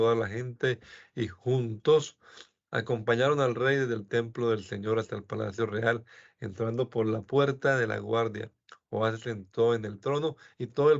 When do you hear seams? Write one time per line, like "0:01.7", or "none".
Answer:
none